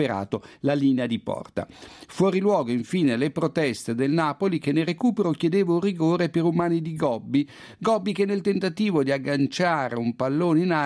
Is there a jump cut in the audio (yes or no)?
no